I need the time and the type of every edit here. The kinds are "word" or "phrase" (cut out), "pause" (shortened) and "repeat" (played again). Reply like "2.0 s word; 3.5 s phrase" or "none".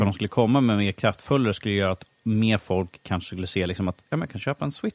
none